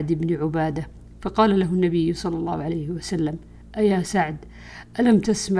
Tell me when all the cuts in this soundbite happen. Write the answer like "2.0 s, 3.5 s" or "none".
none